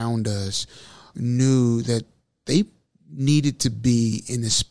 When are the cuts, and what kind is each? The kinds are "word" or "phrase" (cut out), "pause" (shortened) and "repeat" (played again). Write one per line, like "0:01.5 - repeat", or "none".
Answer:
none